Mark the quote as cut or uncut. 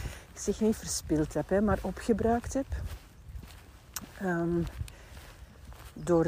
uncut